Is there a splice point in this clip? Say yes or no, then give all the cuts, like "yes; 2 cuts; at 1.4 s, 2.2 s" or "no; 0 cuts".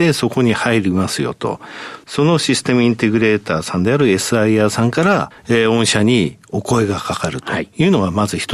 yes; 1 cut; at 5.4 s